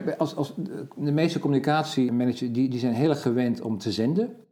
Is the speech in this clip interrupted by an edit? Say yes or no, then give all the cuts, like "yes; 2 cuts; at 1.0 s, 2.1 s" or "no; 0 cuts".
no; 0 cuts